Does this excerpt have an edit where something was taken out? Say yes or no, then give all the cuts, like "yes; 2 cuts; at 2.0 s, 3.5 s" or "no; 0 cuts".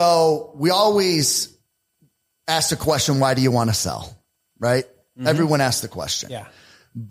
no; 0 cuts